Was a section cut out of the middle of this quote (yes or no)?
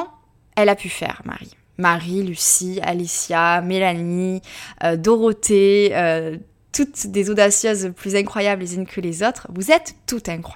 no